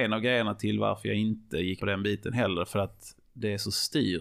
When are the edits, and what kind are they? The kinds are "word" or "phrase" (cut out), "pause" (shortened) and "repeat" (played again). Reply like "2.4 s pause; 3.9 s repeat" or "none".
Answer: 1.8 s word